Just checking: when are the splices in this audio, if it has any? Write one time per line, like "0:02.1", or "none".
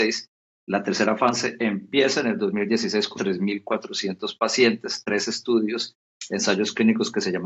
0:03.2